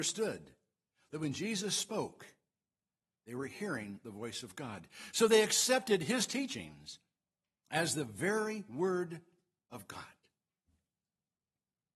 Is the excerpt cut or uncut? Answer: uncut